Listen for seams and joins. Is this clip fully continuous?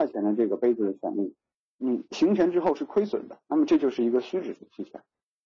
yes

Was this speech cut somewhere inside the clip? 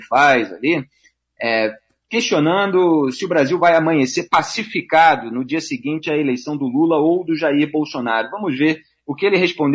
no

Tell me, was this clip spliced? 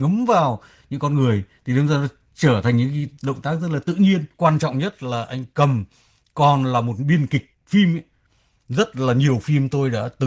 no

